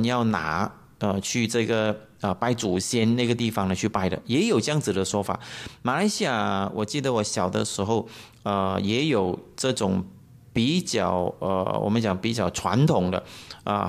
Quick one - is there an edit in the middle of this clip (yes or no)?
no